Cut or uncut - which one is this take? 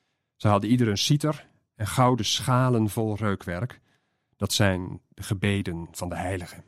uncut